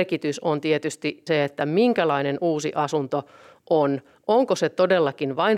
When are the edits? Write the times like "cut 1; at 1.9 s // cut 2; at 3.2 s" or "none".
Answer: cut 1; at 1.3 s

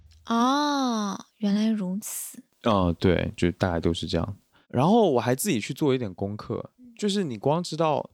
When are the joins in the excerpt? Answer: none

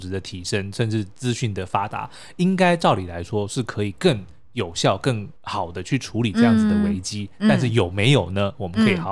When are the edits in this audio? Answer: cut 1; at 5.4 s

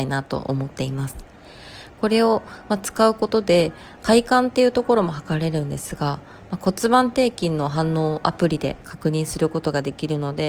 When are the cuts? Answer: cut 1; at 4.0 s

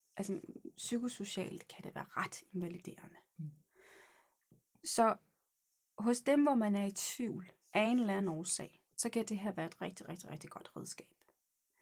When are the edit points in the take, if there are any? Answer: none

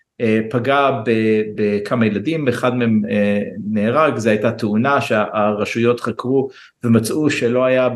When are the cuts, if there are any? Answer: none

